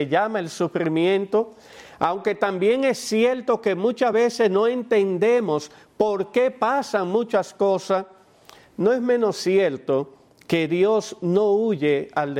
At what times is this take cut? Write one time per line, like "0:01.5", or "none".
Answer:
none